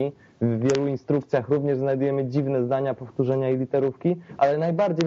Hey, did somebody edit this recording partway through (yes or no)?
no